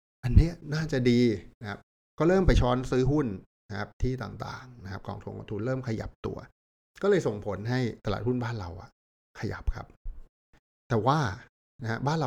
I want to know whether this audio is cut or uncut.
uncut